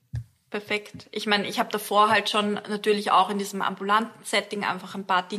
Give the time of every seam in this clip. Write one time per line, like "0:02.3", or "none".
none